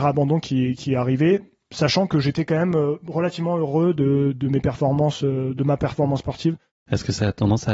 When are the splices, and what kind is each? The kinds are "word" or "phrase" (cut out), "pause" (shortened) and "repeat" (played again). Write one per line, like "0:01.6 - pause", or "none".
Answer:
none